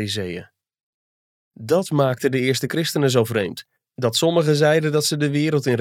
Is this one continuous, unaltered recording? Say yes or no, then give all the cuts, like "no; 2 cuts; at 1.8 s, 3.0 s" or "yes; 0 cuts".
yes; 0 cuts